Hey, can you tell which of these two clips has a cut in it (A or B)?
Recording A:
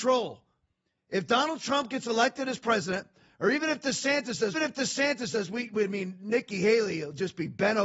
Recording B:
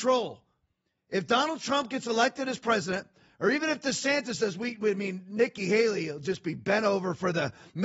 A